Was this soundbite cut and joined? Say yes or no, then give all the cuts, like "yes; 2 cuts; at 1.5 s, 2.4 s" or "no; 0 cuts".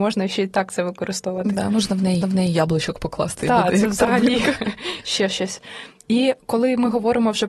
yes; 1 cut; at 2.2 s